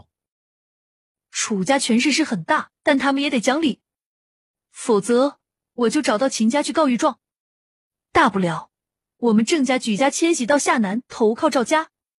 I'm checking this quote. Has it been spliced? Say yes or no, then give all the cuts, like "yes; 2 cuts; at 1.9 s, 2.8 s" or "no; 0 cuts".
yes; 1 cut; at 2.8 s